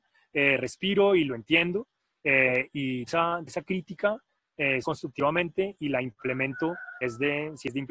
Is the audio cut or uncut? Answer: cut